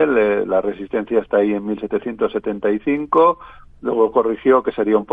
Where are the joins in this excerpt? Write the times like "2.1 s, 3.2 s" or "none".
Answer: none